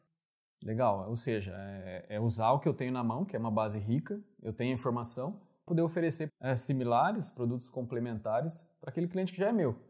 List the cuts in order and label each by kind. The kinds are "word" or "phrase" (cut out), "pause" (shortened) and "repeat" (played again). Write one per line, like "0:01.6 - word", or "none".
0:05.7 - word
0:06.3 - word